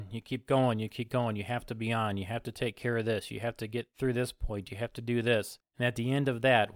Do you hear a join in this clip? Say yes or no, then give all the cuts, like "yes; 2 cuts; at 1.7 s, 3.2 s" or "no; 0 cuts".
yes; 1 cut; at 3.9 s